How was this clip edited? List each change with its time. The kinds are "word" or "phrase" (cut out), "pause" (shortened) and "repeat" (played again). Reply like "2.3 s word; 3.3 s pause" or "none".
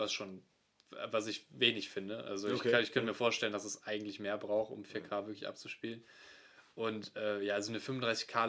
none